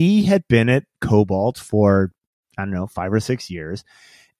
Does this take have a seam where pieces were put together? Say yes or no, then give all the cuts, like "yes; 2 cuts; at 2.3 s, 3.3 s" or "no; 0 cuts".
no; 0 cuts